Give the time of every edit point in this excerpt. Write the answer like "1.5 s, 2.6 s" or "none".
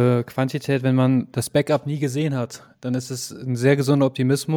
none